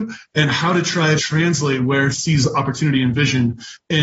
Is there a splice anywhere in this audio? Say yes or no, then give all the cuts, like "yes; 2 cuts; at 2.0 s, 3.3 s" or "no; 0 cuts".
yes; 2 cuts; at 1.2 s, 2.1 s